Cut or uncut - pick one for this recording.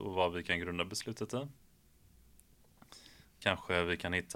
uncut